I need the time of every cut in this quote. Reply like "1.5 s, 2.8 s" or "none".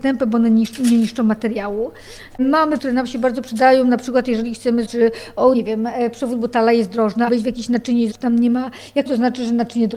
2.8 s, 4.8 s, 5.5 s, 7.3 s, 8.1 s, 9.1 s